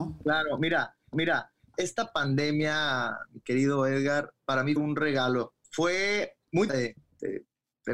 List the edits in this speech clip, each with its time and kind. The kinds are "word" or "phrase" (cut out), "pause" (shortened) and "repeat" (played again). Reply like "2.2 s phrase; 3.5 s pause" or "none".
1.1 s repeat; 4.4 s pause; 4.8 s word; 5.6 s pause; 6.7 s phrase